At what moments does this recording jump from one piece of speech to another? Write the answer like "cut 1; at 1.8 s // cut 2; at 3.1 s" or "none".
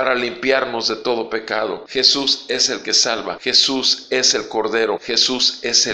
none